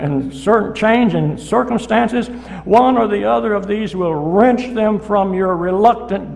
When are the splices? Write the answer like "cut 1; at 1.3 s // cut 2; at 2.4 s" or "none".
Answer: none